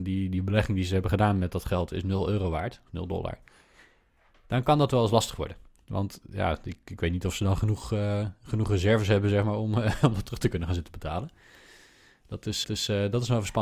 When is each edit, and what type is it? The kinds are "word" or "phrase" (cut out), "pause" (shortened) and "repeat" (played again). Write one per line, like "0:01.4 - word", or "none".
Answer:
0:12.6 - repeat

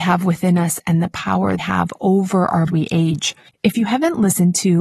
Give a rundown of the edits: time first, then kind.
0:01.6 - phrase
0:02.7 - phrase
0:03.5 - pause

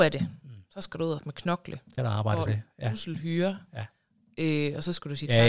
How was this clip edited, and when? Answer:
0:01.2 - word
0:02.0 - word
0:02.5 - word

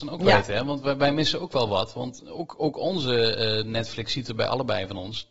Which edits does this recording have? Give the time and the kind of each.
none

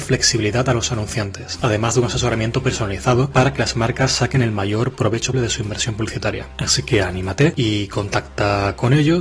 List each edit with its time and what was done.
0:05.3 - word

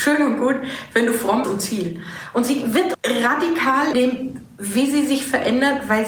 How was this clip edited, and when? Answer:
0:01.4 - phrase
0:02.9 - word
0:03.9 - word

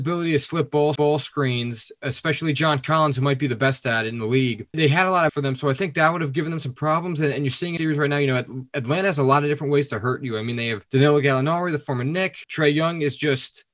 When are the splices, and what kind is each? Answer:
0:01.0 - repeat
0:04.7 - word
0:05.3 - phrase
0:07.8 - word

